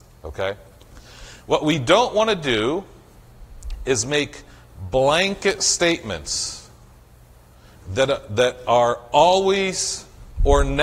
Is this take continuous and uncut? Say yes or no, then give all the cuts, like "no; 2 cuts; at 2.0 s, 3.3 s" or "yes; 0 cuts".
yes; 0 cuts